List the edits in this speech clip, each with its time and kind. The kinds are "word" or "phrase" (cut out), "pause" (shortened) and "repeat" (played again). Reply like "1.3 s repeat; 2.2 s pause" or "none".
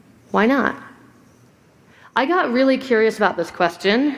none